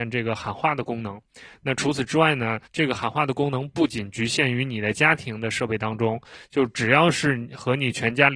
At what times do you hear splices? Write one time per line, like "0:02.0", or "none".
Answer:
0:02.7